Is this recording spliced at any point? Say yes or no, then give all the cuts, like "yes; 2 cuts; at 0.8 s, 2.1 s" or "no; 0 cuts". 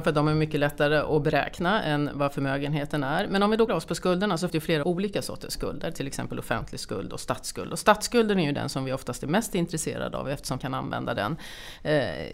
yes; 4 cuts; at 3.7 s, 4.5 s, 4.8 s, 10.6 s